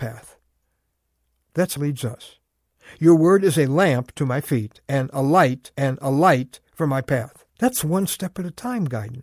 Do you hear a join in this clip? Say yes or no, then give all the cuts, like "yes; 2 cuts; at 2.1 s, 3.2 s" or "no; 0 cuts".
yes; 3 cuts; at 1.8 s, 5.7 s, 7.5 s